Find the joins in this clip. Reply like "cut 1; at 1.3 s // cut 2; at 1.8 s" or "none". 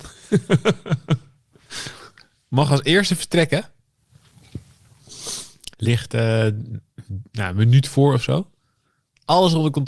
cut 1; at 5.7 s